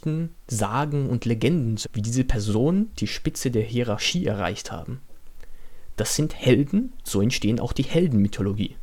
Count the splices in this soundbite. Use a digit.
2